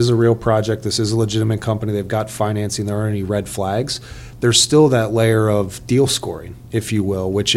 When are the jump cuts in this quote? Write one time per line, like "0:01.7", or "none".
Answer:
none